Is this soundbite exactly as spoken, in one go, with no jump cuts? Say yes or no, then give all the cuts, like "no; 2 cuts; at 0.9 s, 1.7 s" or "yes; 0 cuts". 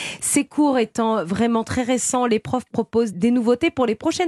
no; 1 cut; at 3.1 s